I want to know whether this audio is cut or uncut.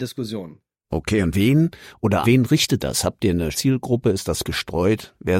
cut